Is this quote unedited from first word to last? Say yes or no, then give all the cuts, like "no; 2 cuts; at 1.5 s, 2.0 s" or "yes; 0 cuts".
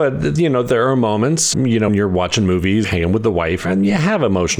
no; 4 cuts; at 1.5 s, 1.9 s, 2.8 s, 3.6 s